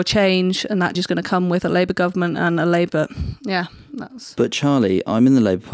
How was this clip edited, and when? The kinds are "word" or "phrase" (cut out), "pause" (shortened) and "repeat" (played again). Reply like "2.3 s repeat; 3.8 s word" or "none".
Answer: 0.9 s word; 2.9 s word

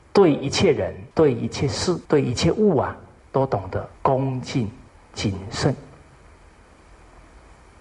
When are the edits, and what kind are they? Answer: 1.1 s pause; 2.0 s pause; 3.2 s pause; 4.0 s pause; 4.9 s pause

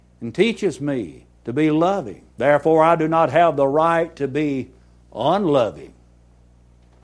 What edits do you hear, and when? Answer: 1.3 s pause; 2.3 s pause

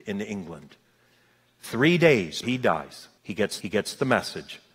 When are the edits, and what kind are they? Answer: 2.4 s word; 3.2 s pause; 3.6 s repeat

